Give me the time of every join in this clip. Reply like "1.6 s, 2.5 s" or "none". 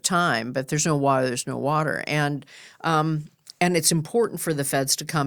none